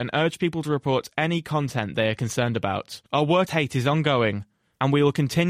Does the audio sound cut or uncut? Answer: cut